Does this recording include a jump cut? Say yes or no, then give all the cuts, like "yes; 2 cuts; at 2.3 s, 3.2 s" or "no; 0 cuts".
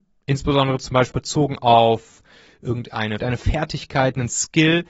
yes; 2 cuts; at 1.1 s, 3.2 s